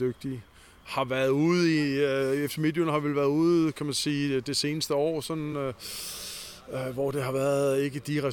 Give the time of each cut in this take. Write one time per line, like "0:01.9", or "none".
none

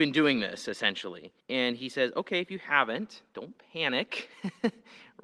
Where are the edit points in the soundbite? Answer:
0:01.4

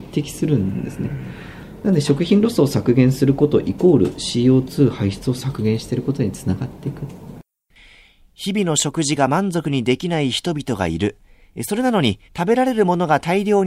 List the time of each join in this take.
0:12.3

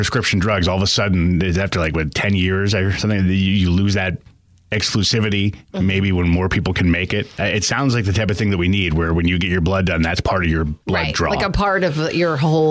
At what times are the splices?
0:10.8

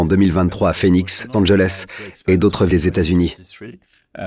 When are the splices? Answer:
0:01.3
0:02.7

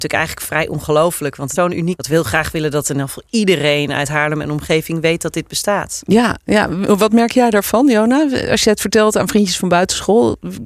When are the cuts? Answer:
0:01.6
0:02.0

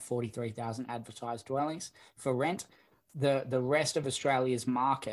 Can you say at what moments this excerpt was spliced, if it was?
none

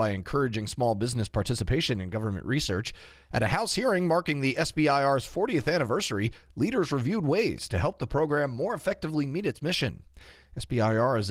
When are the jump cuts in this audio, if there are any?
none

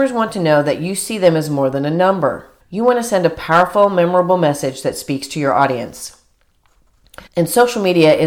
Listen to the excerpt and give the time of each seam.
0:02.6
0:07.3

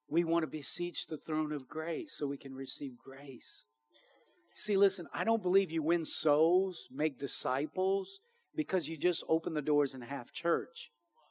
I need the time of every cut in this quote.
none

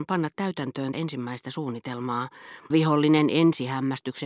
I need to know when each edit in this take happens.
0:00.9
0:02.7

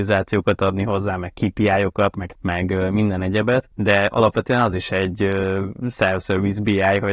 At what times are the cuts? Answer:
0:02.3

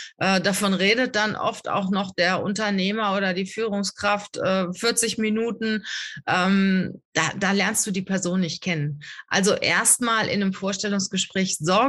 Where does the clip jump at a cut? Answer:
0:07.1

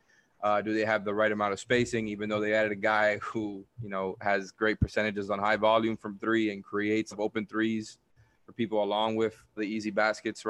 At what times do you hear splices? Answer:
0:03.7
0:07.1
0:09.6

